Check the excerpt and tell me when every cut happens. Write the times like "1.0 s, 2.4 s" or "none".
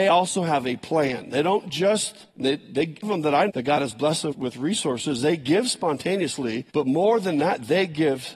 2.3 s, 3.0 s, 3.5 s, 4.3 s, 6.7 s